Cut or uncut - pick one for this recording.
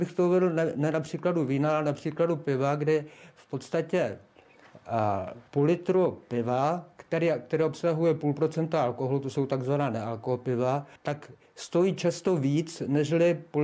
cut